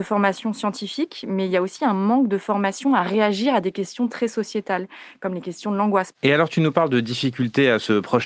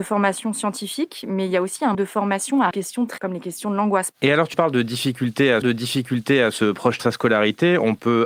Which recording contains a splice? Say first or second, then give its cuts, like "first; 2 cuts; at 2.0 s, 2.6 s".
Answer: second; 6 cuts; at 1.9 s, 2.7 s, 3.2 s, 4.5 s, 5.6 s, 7.0 s